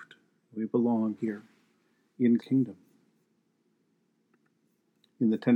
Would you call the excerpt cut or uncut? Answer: cut